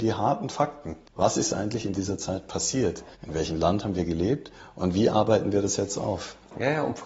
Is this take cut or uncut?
cut